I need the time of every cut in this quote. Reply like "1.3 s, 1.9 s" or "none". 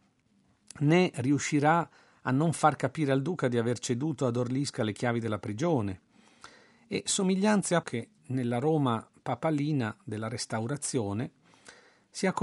7.8 s